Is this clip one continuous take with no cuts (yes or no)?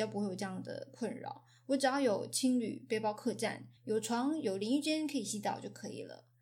no